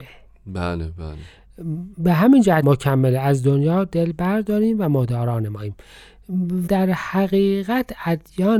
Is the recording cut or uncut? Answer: cut